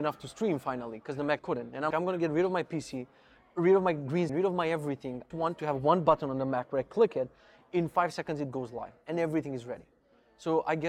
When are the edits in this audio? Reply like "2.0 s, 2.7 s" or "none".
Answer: 1.4 s, 1.9 s, 4.3 s, 5.3 s